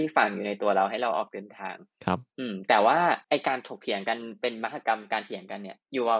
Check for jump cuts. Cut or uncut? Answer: cut